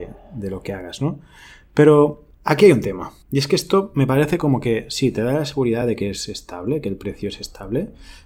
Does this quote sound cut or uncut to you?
uncut